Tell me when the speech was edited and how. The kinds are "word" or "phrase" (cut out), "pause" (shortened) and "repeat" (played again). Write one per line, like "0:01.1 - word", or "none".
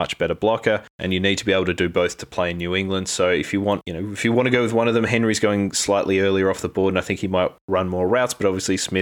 none